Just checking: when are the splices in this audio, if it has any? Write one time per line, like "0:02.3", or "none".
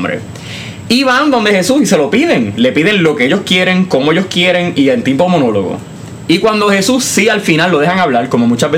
none